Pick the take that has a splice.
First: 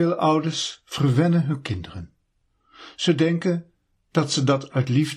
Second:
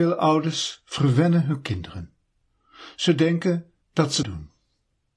second; 2 cuts; at 3.8 s, 4.2 s

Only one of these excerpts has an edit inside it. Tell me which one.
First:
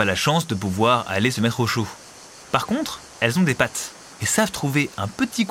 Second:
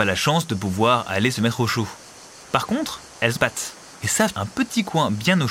second; 2 cuts; at 3.4 s, 4.3 s

